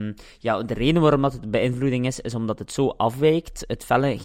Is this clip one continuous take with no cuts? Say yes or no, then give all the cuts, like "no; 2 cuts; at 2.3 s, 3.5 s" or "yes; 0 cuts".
yes; 0 cuts